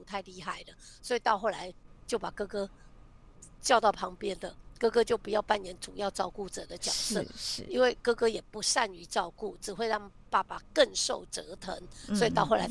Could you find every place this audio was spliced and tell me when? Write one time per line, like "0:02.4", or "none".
none